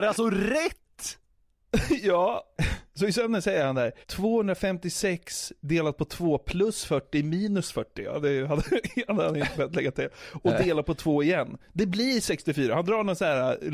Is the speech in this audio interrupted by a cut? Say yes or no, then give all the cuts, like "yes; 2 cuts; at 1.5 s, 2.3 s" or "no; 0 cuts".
yes; 1 cut; at 4.0 s